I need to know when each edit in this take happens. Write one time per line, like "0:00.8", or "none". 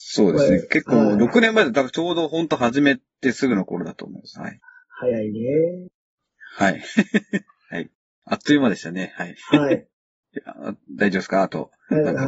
none